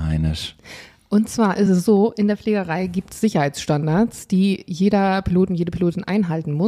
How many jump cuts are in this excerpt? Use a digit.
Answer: 0